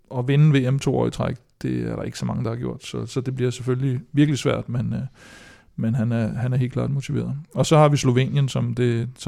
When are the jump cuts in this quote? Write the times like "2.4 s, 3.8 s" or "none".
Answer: none